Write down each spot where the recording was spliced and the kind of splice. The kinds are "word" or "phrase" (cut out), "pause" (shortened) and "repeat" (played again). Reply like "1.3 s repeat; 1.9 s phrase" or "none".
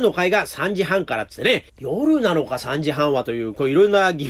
1.7 s pause

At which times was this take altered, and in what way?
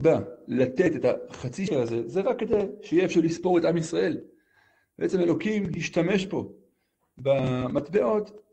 1.7 s word; 3.1 s word

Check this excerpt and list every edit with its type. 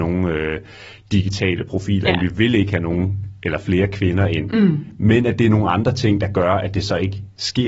none

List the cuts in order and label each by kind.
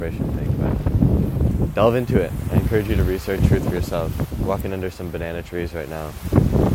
3.4 s phrase

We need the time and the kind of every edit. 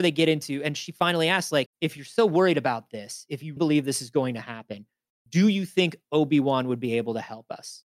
1.7 s word; 3.6 s word

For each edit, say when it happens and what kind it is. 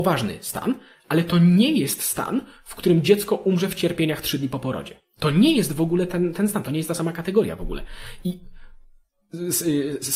none

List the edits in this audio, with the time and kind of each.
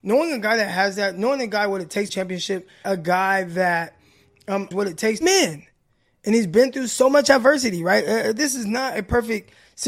2.1 s phrase; 2.8 s phrase; 4.7 s word; 5.2 s phrase

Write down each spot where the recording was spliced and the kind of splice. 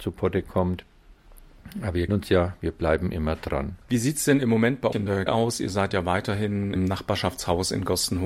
2.1 s word; 3.8 s pause; 4.9 s word; 5.3 s word; 6.8 s word

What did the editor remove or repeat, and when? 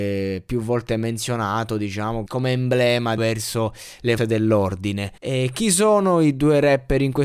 2.3 s word; 3.2 s phrase; 4.2 s word; 5.2 s pause

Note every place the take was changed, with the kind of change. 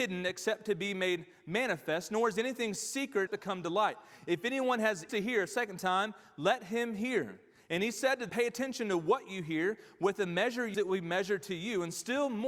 3.3 s word; 5.1 s word; 8.3 s word; 10.7 s word

